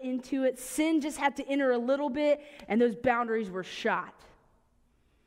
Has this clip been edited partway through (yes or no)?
no